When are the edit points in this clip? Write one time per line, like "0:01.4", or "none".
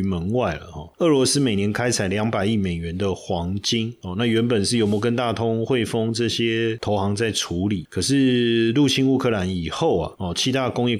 none